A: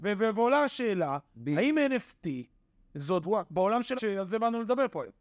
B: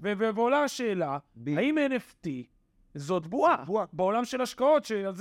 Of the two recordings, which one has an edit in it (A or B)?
A